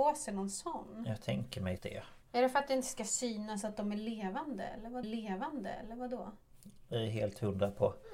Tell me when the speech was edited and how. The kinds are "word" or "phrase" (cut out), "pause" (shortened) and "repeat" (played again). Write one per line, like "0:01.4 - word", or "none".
0:01.8 - word
0:05.0 - repeat
0:06.9 - phrase